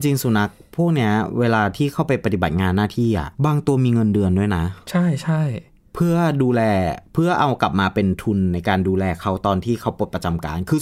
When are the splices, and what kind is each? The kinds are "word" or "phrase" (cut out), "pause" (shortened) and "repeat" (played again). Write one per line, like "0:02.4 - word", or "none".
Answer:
0:03.3 - pause